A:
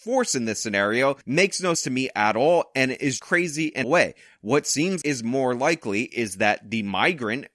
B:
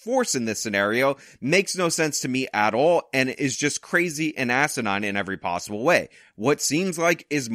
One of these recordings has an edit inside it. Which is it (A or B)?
A